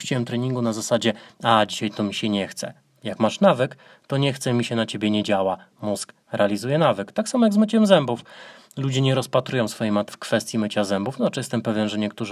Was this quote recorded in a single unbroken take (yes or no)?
no